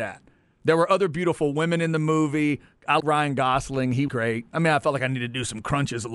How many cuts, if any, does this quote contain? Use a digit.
2